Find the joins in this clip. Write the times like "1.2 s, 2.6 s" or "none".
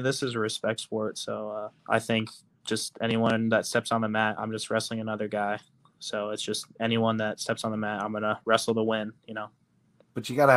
1.8 s